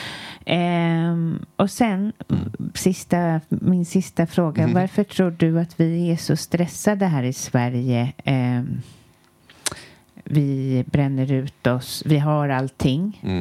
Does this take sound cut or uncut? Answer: uncut